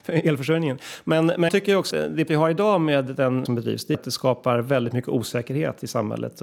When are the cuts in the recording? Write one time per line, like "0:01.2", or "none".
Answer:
0:01.5
0:01.9
0:02.3
0:03.5
0:03.9